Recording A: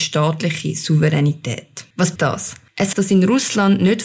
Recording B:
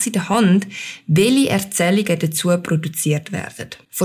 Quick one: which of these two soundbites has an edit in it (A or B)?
A